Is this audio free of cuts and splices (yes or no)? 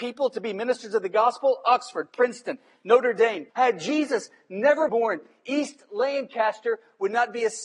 no